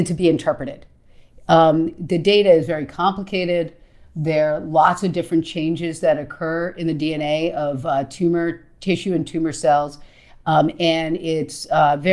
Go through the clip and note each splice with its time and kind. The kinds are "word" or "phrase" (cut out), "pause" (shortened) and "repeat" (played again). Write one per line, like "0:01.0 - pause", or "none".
none